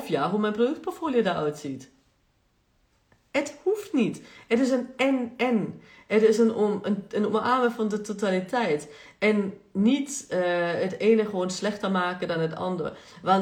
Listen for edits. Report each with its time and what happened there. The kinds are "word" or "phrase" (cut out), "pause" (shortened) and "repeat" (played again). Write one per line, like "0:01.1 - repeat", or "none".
none